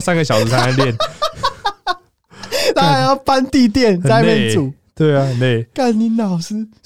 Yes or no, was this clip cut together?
no